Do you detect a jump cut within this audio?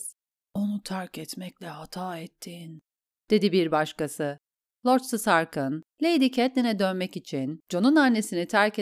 no; 0 cuts

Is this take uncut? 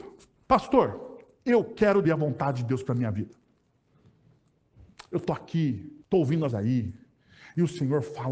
no; 3 cuts; at 2.0 s, 6.0 s, 6.5 s

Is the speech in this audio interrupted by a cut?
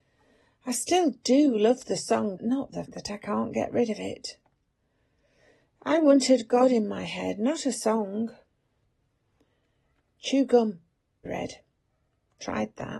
yes; 3 cuts; at 2.4 s, 2.9 s, 11.3 s

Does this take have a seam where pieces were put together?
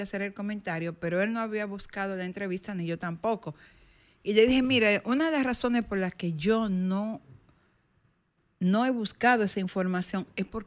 no; 0 cuts

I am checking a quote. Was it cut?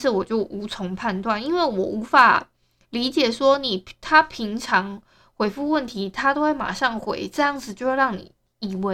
no; 0 cuts

